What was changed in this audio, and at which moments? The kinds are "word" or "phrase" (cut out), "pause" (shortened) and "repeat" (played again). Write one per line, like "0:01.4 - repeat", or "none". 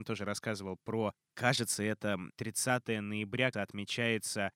0:03.5 - word